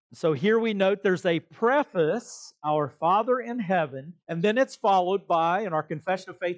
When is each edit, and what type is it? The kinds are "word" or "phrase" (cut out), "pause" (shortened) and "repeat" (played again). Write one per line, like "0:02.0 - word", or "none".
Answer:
0:04.2 - pause